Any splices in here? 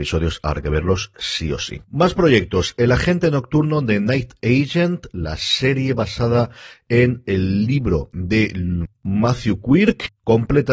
no; 0 cuts

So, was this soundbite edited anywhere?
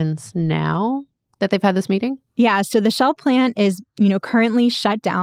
no; 0 cuts

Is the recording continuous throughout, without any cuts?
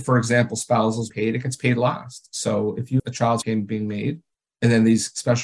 no; 4 cuts; at 1.1 s, 3.0 s, 3.4 s, 4.3 s

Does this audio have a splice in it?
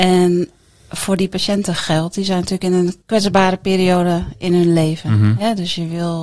yes; 1 cut; at 3.0 s

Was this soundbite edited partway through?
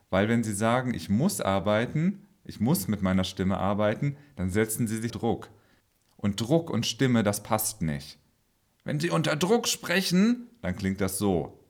yes; 1 cut; at 5.1 s

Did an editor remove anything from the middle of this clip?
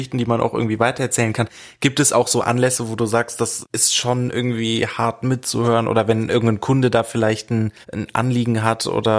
yes; 1 cut; at 7.8 s

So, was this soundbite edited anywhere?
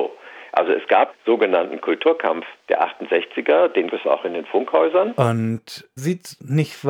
yes; 4 cuts; at 1.1 s, 2.6 s, 3.9 s, 6.0 s

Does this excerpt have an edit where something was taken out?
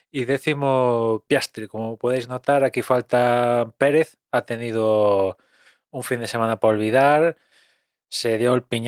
no; 0 cuts

